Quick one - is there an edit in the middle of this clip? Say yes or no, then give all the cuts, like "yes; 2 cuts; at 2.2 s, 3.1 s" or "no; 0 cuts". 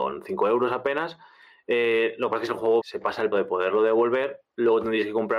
yes; 3 cuts; at 2.5 s, 2.8 s, 3.3 s